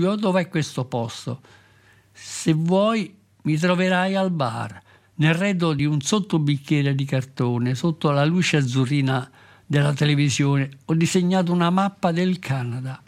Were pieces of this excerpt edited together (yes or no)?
no